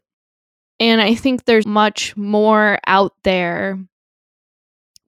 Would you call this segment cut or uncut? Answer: cut